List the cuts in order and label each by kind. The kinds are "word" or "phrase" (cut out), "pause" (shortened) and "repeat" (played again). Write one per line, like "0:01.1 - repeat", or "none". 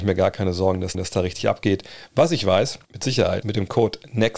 0:00.9 - repeat
0:02.8 - pause
0:03.4 - word